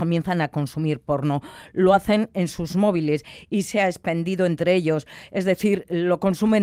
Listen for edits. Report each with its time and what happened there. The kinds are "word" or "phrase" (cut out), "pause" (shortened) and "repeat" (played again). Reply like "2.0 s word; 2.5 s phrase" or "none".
none